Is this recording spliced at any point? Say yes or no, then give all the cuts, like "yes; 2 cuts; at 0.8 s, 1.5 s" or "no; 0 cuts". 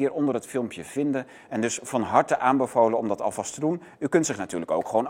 no; 0 cuts